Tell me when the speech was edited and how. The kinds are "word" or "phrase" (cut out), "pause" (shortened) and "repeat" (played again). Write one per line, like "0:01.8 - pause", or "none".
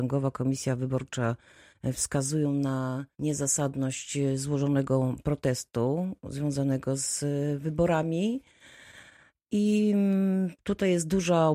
0:03.1 - pause